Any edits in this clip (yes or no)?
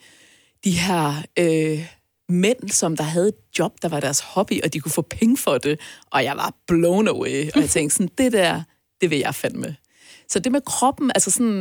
no